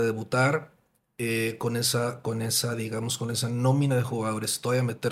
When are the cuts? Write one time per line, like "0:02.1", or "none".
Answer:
none